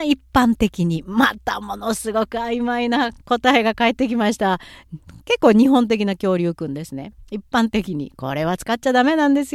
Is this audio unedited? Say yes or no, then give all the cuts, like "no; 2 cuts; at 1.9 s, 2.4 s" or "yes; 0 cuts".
no; 1 cut; at 3.2 s